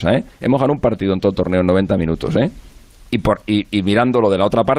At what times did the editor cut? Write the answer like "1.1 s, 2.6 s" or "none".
none